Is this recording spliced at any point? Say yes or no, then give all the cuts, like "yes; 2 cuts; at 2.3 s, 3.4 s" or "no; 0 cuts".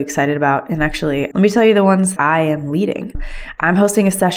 yes; 2 cuts; at 1.3 s, 2.2 s